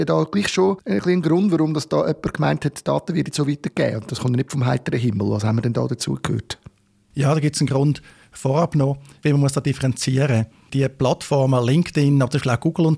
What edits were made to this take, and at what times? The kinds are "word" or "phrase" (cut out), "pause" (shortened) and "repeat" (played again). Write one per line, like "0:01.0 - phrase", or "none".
none